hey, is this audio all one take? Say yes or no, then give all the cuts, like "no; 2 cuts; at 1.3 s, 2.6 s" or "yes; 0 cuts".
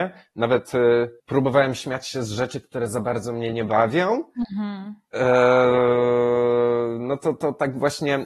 no; 1 cut; at 1.2 s